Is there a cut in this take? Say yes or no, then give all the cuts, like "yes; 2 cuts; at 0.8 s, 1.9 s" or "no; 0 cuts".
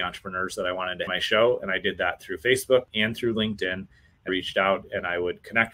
yes; 3 cuts; at 1.1 s, 2.9 s, 4.3 s